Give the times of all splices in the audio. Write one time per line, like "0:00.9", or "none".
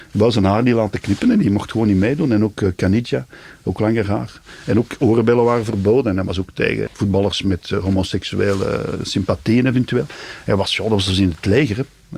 0:06.9